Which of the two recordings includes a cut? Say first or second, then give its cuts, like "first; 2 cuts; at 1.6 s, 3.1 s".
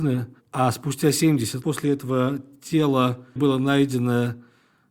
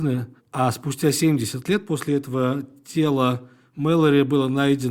first; 2 cuts; at 1.6 s, 3.4 s